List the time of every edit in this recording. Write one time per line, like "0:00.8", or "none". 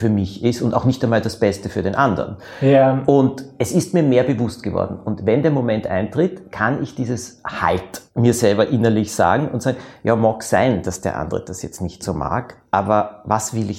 0:08.1